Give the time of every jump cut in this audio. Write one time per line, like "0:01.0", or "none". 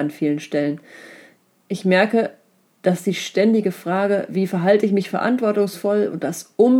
none